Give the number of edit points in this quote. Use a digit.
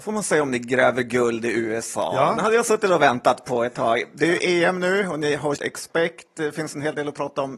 1